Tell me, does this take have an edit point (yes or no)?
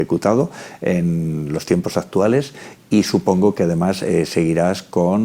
no